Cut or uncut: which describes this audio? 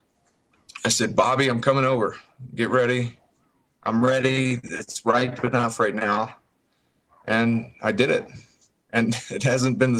uncut